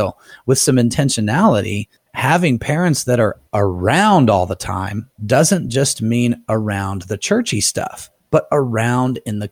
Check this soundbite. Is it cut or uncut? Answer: cut